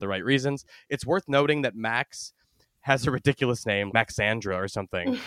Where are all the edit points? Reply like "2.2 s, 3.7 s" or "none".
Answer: 3.9 s